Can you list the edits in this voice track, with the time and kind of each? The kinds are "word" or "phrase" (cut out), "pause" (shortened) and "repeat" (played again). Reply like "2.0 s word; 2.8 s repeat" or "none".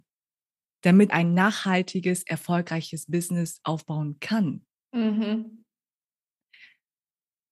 1.1 s word